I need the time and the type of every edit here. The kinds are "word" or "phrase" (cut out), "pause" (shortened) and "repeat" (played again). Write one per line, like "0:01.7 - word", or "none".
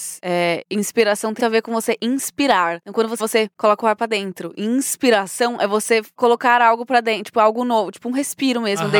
0:01.4 - word
0:03.2 - word